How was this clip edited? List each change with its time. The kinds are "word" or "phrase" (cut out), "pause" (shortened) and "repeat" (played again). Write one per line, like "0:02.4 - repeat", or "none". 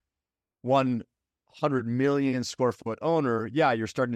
none